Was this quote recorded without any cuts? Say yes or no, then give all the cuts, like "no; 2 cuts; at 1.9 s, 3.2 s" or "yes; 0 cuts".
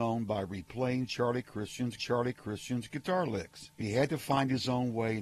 no; 2 cuts; at 2.0 s, 3.8 s